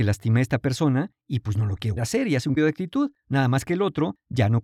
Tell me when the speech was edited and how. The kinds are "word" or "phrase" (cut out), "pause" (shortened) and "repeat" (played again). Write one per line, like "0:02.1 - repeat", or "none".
0:02.0 - word
0:02.6 - word

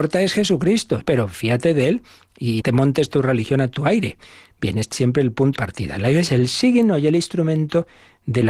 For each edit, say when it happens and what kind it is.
0:01.0 - word
0:02.6 - word
0:04.9 - word
0:05.6 - word
0:06.3 - word

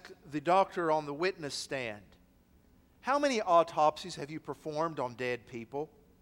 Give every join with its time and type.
none

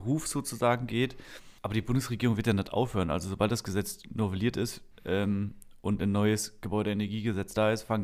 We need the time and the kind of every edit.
0:01.6 - pause
0:04.9 - pause

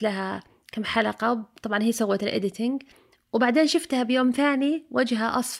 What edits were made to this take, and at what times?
none

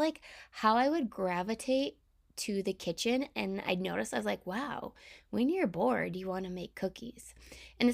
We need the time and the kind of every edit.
none

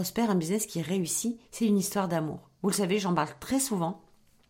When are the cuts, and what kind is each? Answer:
0:01.5 - pause

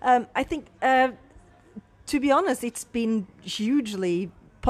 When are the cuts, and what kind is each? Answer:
0:03.3 - pause

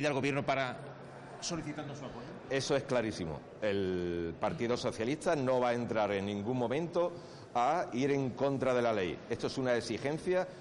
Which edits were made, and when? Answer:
none

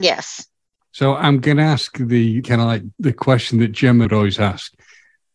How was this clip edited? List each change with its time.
0:02.4 - word
0:02.9 - pause
0:04.0 - phrase

